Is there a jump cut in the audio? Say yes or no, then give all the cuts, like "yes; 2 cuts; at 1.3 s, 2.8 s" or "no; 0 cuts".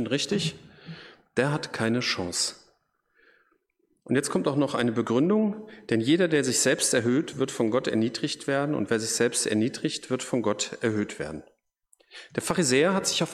no; 0 cuts